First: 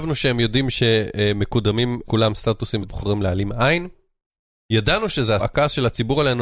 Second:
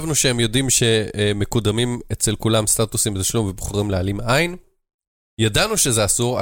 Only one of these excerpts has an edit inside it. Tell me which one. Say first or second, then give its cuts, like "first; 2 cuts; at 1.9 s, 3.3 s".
first; 3 cuts; at 2.0 s, 2.8 s, 5.4 s